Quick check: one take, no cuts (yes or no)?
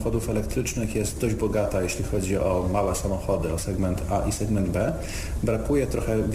yes